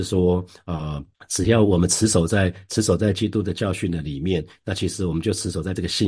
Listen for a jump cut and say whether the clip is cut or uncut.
cut